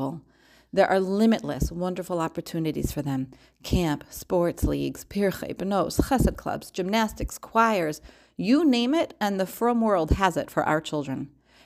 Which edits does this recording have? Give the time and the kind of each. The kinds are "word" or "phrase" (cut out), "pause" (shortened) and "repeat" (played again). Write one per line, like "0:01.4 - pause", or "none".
none